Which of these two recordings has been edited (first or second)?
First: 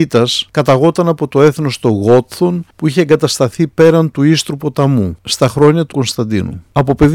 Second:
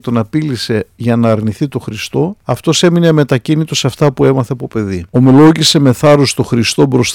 first